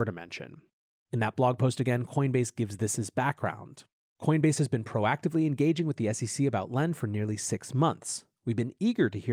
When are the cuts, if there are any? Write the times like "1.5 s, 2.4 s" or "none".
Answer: 4.0 s